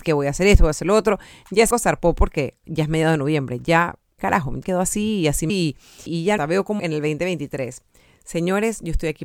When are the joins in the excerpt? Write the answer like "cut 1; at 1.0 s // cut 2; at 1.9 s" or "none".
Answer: cut 1; at 1.7 s // cut 2; at 2.6 s // cut 3; at 4.2 s // cut 4; at 4.6 s // cut 5; at 5.5 s // cut 6; at 6.1 s // cut 7; at 6.4 s // cut 8; at 6.8 s